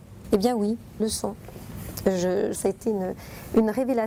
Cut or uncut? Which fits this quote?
cut